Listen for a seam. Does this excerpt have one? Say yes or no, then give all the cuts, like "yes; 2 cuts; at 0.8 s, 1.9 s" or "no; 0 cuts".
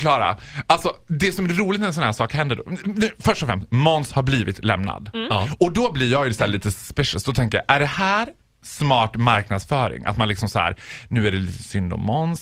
no; 0 cuts